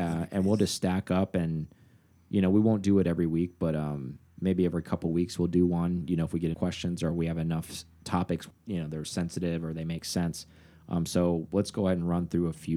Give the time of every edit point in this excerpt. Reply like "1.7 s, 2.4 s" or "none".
6.5 s, 8.5 s

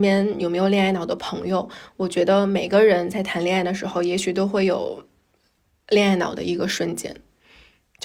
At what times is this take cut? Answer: none

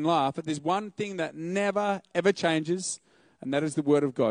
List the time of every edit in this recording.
2.1 s

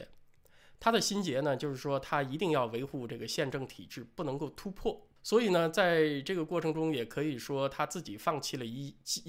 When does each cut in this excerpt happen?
5.2 s

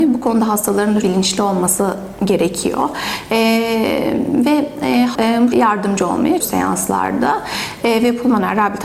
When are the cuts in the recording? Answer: 1.0 s, 5.1 s, 5.5 s, 6.4 s

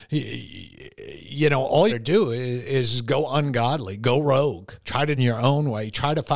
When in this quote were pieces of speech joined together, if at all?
1.9 s, 4.8 s, 5.2 s

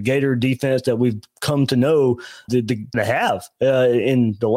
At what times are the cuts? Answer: 2.5 s, 2.9 s

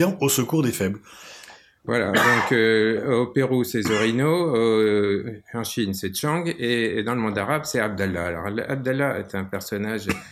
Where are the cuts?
none

